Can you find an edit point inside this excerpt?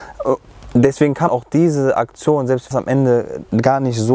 yes; 2 cuts; at 1.3 s, 2.7 s

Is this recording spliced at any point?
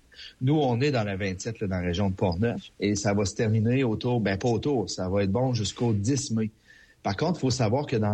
yes; 1 cut; at 2.7 s

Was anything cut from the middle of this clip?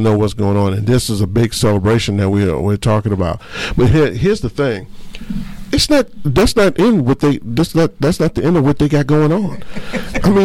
no; 0 cuts

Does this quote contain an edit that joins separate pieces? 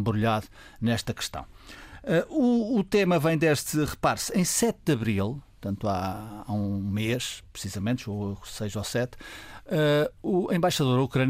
no; 0 cuts

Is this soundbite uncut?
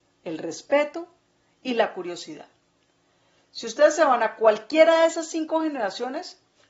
yes; 0 cuts

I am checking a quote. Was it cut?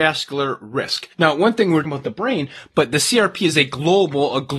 yes; 2 cuts; at 1.1 s, 1.8 s

